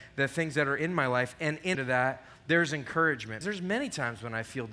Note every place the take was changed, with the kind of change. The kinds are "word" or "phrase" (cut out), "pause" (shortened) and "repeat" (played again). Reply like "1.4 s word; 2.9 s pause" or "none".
1.7 s word; 3.4 s word